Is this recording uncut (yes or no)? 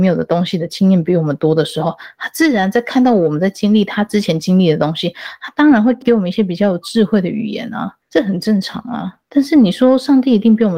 yes